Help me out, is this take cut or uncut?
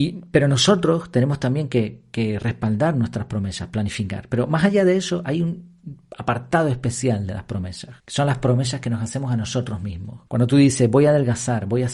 cut